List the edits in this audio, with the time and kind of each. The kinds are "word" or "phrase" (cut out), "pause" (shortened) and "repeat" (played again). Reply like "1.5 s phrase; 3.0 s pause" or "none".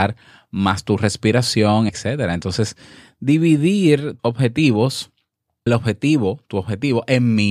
1.9 s word; 4.2 s word; 5.7 s word